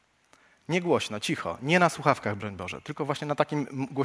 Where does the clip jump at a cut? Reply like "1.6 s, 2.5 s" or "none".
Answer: none